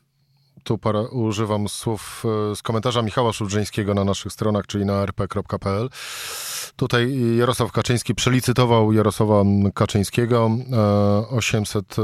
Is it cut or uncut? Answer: uncut